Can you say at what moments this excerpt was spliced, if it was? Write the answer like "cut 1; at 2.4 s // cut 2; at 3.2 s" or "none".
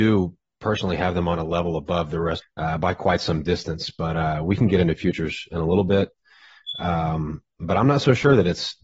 cut 1; at 2.4 s